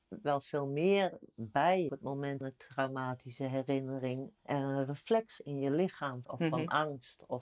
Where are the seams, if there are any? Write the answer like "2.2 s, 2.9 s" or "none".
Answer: 1.9 s, 2.4 s, 4.4 s, 5.4 s, 6.2 s